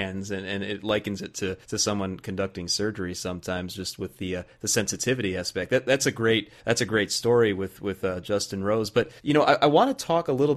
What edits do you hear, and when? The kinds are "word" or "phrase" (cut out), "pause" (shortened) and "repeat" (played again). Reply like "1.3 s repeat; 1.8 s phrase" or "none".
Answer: 1.6 s pause; 6.6 s pause; 9.2 s pause